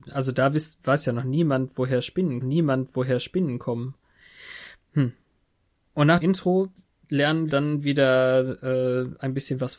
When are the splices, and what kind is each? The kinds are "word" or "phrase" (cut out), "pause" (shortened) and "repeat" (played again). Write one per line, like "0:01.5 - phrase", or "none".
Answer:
0:02.4 - repeat
0:06.2 - word
0:07.5 - word